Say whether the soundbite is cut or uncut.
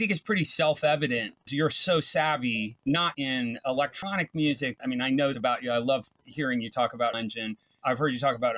cut